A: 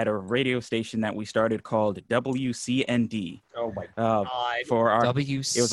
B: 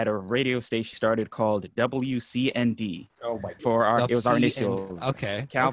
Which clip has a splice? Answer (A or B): B